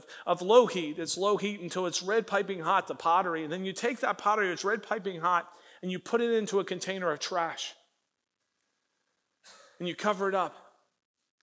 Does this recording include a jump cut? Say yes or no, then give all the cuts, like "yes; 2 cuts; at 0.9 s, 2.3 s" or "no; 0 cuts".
no; 0 cuts